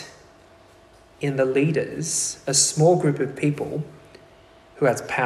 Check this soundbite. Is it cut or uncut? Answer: uncut